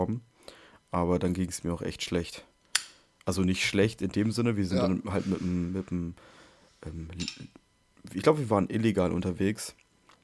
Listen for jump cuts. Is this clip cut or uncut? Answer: uncut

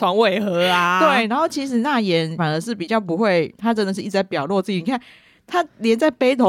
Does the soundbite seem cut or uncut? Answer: uncut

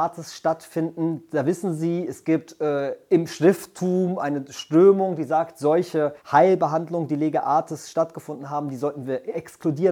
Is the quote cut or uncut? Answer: cut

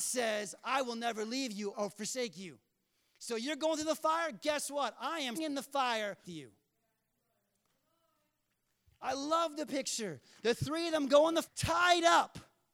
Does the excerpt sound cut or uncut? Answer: cut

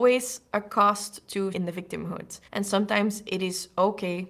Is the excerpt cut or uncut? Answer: cut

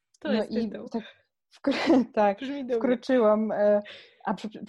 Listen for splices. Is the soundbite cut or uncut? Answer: uncut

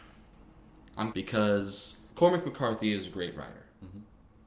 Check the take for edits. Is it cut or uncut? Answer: cut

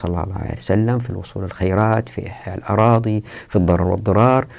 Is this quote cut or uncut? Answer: uncut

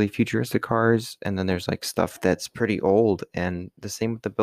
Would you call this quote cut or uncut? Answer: uncut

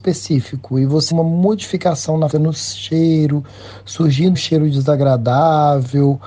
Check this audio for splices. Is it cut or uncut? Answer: cut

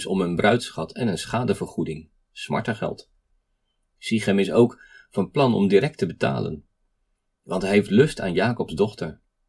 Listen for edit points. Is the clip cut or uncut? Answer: uncut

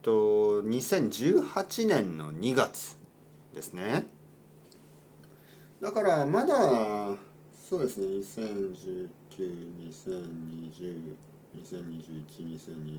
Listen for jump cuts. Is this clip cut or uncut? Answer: uncut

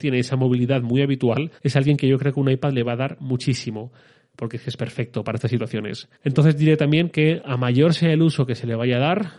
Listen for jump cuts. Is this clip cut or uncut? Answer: cut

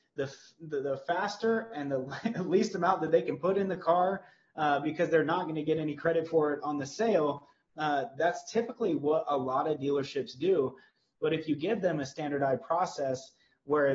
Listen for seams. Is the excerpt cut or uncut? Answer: uncut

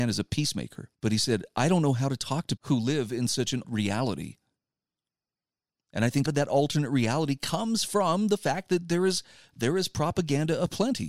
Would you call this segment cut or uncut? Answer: cut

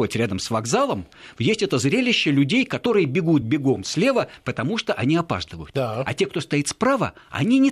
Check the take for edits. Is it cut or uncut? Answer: uncut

